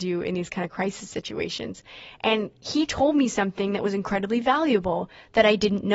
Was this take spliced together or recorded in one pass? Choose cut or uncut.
uncut